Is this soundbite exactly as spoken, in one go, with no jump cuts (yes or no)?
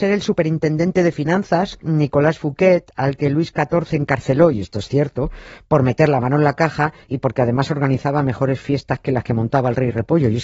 yes